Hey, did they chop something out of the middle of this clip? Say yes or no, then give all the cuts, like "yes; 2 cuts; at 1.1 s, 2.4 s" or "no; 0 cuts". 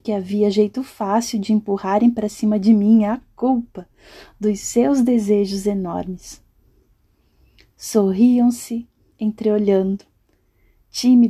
no; 0 cuts